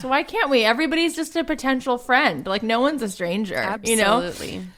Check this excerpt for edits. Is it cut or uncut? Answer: uncut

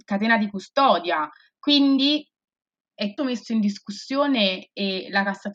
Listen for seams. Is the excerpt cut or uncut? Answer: cut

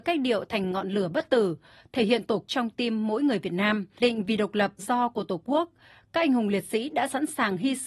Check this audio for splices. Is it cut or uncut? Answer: cut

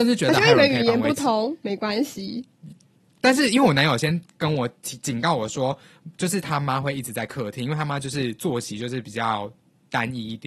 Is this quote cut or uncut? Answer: uncut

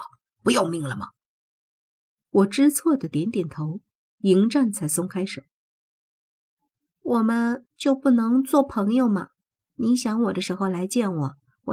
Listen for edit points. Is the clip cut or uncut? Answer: uncut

